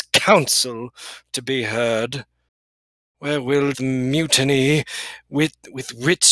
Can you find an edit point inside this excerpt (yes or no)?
yes